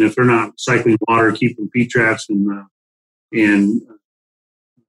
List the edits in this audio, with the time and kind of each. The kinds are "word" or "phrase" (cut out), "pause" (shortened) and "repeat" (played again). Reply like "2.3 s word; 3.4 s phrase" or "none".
none